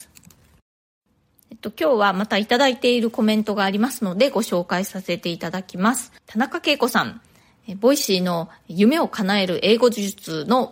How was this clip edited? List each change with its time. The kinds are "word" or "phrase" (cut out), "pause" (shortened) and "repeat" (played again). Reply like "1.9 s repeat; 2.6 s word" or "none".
6.2 s pause

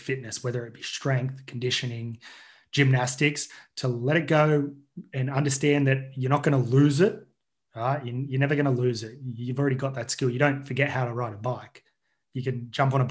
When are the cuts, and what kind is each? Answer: none

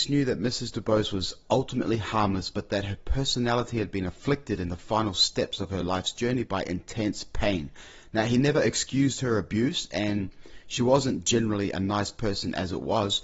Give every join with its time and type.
none

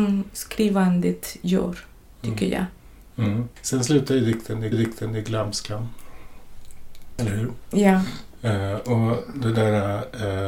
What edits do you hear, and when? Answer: 3.5 s pause; 4.7 s repeat

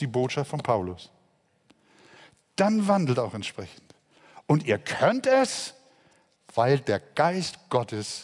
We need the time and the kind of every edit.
none

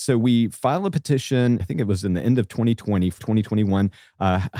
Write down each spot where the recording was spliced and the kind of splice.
1.6 s word; 3.2 s word

